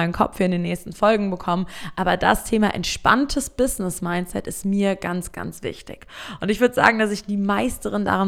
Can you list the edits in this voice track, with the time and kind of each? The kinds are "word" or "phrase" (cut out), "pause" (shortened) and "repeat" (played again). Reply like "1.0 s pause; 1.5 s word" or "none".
5.3 s word